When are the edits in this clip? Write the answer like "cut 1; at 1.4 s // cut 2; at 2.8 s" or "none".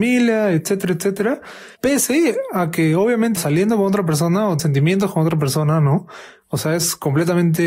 cut 1; at 1.8 s // cut 2; at 3.4 s // cut 3; at 4.6 s